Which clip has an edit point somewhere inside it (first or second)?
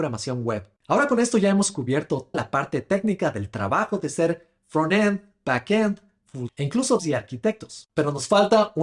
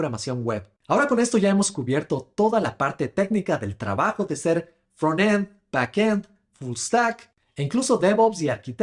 first